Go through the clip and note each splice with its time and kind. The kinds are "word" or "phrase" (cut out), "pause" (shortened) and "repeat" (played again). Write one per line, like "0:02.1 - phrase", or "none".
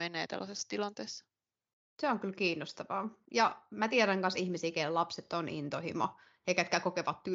none